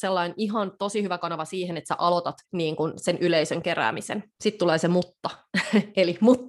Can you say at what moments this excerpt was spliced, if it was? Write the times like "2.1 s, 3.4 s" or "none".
2.4 s, 4.3 s